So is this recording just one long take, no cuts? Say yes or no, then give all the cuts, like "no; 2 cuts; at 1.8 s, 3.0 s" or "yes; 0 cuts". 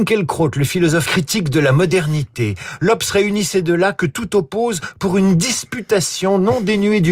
no; 1 cut; at 1.1 s